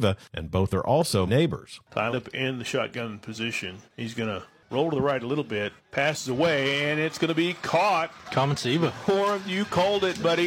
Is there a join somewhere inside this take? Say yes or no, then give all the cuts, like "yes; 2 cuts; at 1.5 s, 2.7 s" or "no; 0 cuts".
yes; 4 cuts; at 1.3 s, 2.1 s, 3.9 s, 5.8 s